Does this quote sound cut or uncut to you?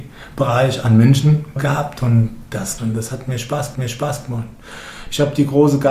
cut